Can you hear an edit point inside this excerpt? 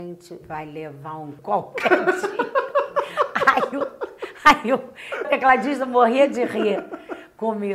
yes; 2 cuts; at 1.4 s, 5.2 s

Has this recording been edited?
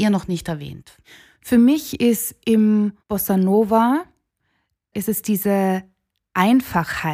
yes; 2 cuts; at 3.0 s, 4.9 s

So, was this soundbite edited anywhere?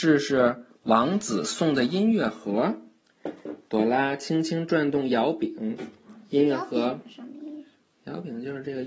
no; 0 cuts

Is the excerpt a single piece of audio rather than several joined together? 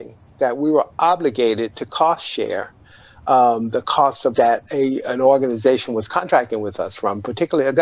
no; 1 cut; at 4.3 s

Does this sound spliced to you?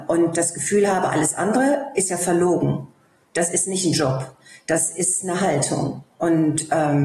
no; 0 cuts

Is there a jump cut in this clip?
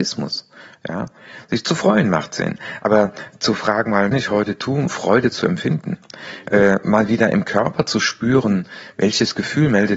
yes; 2 cuts; at 4.1 s, 4.9 s

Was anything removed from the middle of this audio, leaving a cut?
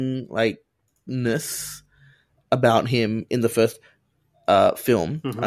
no; 0 cuts

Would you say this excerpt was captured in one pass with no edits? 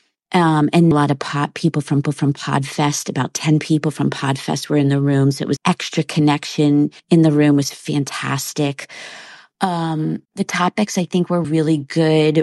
no; 6 cuts; at 0.9 s, 2.0 s, 5.6 s, 7.0 s, 10.3 s, 11.4 s

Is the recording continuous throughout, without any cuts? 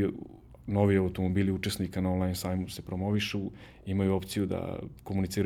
yes; 0 cuts

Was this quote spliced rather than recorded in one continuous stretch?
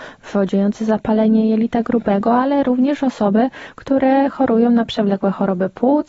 no; 0 cuts

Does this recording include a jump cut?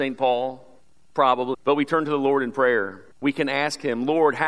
yes; 1 cut; at 3.1 s

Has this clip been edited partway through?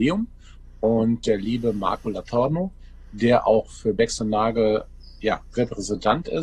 no; 0 cuts

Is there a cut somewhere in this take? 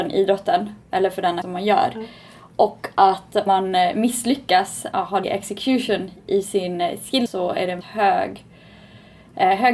yes; 6 cuts; at 1.4 s, 3.5 s, 4.9 s, 5.2 s, 7.3 s, 7.8 s

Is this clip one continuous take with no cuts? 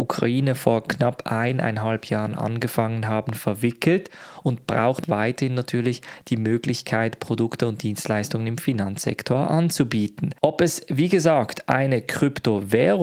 yes; 0 cuts

